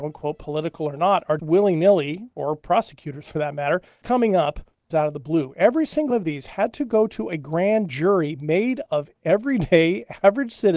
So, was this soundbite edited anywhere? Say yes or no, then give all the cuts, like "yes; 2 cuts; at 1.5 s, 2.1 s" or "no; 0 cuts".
yes; 6 cuts; at 1.4 s, 2.3 s, 4.0 s, 4.9 s, 6.1 s, 8.9 s